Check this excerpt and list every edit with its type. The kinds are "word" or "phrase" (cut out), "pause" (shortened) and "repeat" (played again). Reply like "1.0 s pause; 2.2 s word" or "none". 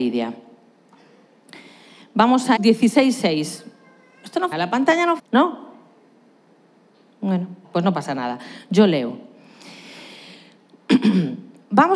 2.6 s word; 4.5 s word; 5.2 s word; 7.6 s word